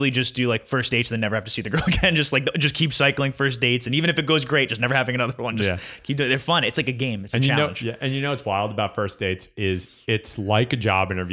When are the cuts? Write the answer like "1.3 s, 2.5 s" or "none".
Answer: none